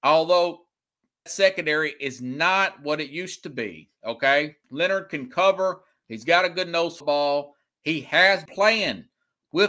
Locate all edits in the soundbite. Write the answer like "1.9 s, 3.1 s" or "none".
1.3 s, 4.6 s, 7.0 s, 8.5 s